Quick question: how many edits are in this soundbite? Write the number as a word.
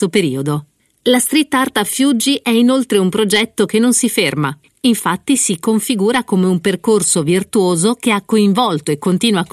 zero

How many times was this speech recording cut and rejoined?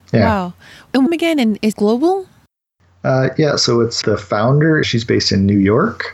four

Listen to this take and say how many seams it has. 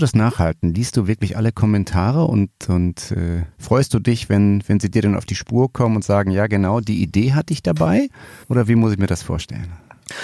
two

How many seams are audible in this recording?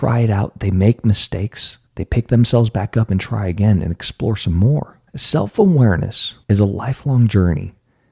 three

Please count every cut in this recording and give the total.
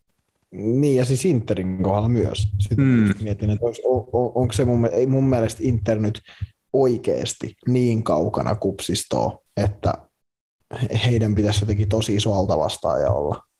two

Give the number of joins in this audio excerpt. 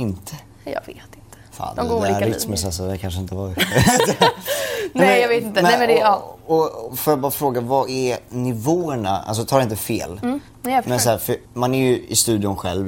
two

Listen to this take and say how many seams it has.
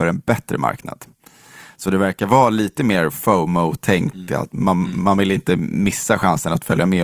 zero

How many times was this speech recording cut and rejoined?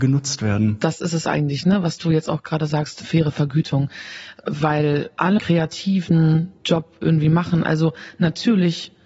one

